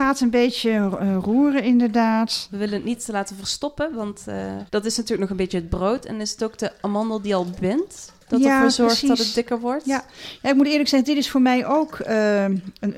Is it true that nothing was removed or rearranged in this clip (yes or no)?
no